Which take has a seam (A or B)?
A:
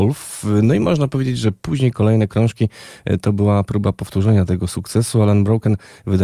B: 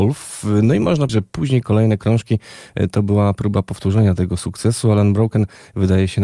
B